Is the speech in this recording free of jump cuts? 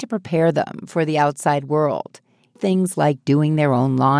no; 1 cut; at 2.6 s

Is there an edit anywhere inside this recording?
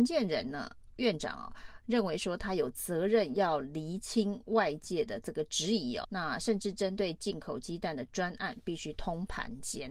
yes; 1 cut; at 6.0 s

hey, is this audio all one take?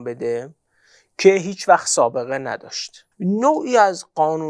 no; 1 cut; at 3.1 s

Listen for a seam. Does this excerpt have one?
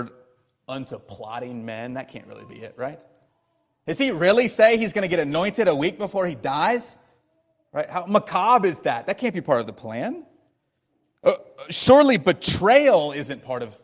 no; 0 cuts

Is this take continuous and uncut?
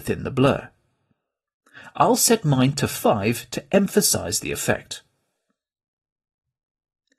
yes; 0 cuts

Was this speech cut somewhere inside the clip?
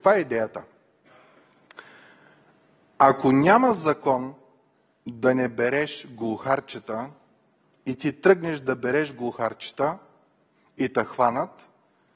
no; 0 cuts

